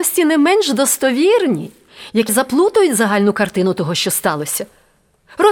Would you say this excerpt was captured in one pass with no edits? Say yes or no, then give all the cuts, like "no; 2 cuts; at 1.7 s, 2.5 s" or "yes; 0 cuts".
no; 1 cut; at 2.3 s